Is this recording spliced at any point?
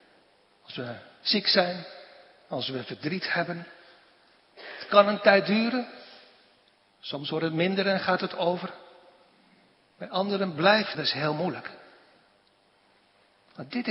yes; 1 cut; at 10.9 s

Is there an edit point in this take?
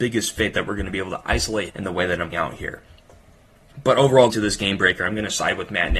yes; 3 cuts; at 1.7 s, 2.3 s, 4.3 s

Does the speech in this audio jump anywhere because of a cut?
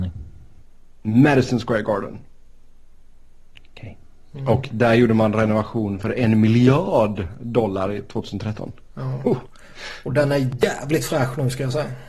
no; 0 cuts

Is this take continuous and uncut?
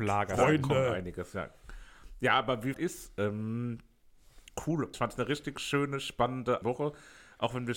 no; 3 cuts; at 2.7 s, 4.9 s, 6.6 s

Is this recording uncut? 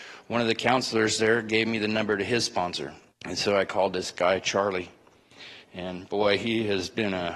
no; 1 cut; at 3.1 s

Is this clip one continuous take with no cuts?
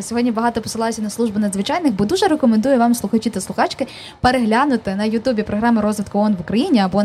yes; 0 cuts

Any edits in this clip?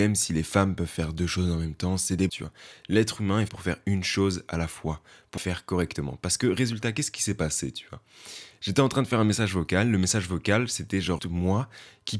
yes; 4 cuts; at 2.3 s, 3.5 s, 5.4 s, 11.2 s

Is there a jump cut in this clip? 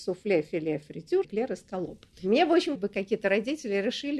yes; 3 cuts; at 1.2 s, 2.1 s, 2.8 s

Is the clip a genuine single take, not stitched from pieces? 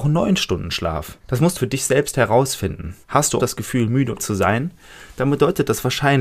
no; 5 cuts; at 1.2 s, 1.6 s, 3.0 s, 3.4 s, 4.2 s

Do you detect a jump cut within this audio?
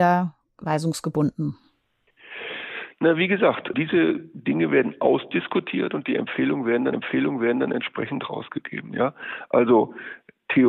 yes; 2 cuts; at 3.7 s, 6.9 s

